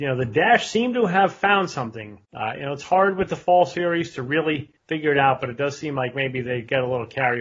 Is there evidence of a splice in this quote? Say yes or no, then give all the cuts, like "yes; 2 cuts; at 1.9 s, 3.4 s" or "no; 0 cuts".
yes; 2 cuts; at 2.2 s, 4.8 s